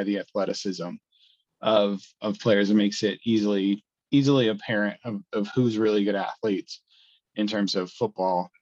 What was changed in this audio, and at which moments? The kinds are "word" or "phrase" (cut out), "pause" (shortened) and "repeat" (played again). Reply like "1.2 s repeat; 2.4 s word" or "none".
none